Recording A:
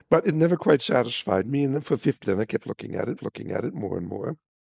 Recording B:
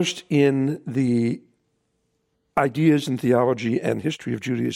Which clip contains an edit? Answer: A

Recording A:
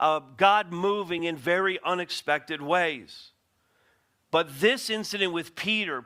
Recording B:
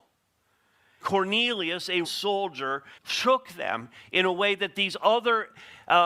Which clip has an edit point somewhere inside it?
B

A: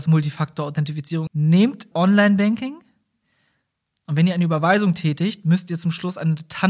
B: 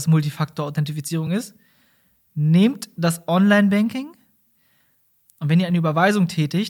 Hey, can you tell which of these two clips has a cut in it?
A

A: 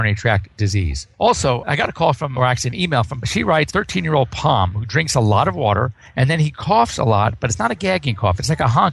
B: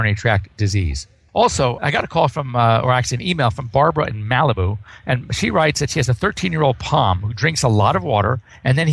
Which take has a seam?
A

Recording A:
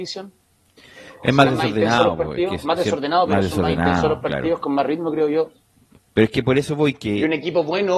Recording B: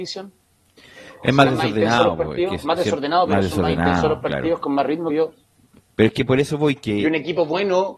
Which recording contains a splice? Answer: B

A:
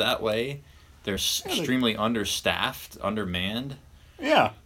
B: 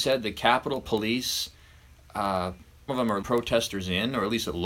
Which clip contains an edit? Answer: B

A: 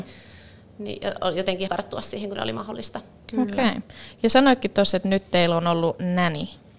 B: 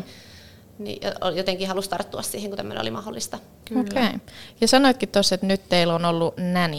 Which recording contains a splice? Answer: A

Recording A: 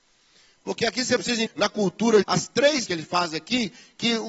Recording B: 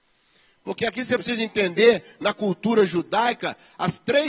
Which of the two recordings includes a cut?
A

